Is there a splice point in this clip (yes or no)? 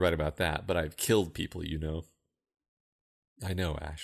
no